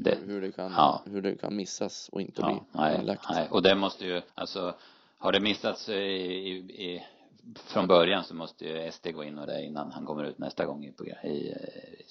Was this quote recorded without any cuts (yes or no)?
no